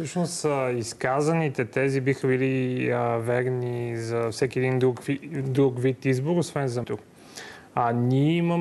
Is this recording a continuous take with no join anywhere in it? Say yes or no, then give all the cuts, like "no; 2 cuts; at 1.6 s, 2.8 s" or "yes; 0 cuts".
no; 1 cut; at 6.8 s